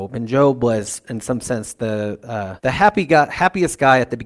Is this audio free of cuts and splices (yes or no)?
no